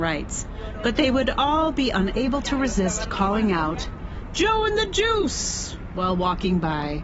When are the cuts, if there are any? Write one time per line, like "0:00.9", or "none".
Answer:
none